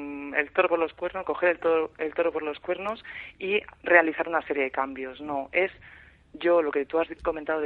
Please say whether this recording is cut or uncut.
uncut